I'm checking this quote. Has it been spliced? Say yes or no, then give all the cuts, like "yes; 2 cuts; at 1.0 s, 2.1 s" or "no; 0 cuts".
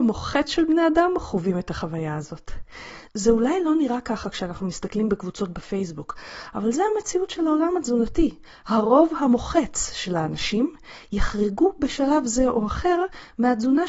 no; 0 cuts